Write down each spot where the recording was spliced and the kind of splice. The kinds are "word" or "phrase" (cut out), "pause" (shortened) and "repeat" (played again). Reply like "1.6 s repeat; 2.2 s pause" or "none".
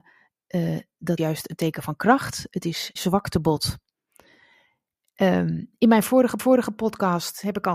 1.2 s word; 3.0 s word; 6.4 s repeat